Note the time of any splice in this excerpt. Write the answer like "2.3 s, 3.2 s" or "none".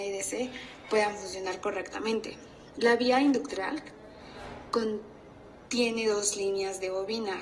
5.7 s